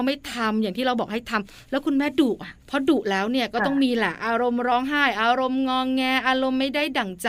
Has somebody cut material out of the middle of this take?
yes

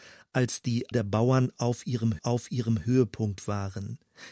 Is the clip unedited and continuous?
no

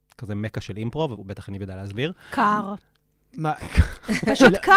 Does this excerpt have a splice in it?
no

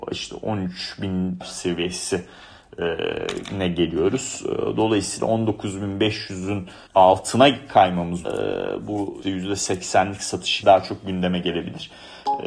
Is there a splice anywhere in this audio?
yes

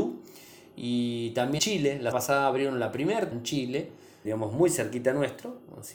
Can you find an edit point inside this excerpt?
yes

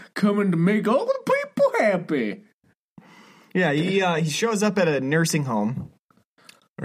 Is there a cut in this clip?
no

